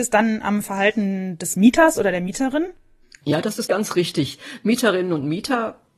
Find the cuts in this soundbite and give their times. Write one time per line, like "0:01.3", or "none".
0:03.7